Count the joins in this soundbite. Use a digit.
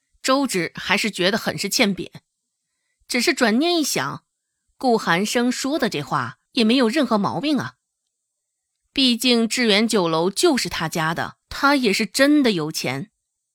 2